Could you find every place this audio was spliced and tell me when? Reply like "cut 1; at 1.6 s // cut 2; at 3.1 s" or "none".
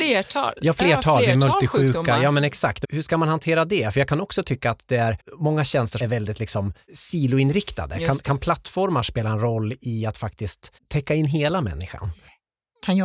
cut 1; at 2.8 s // cut 2; at 5.2 s // cut 3; at 6.0 s // cut 4; at 10.8 s